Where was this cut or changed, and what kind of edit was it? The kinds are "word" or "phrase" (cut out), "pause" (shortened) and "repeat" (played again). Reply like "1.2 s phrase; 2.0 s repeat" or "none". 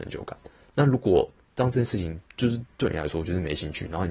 none